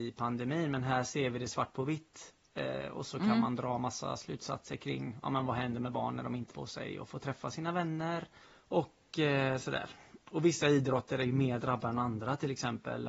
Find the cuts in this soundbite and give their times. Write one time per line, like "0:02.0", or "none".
0:06.5
0:08.4
0:10.2